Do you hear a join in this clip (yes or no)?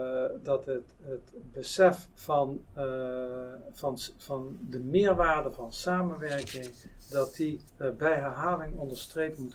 yes